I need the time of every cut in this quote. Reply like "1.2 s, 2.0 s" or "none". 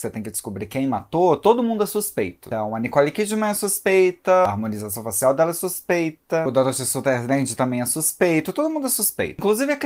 none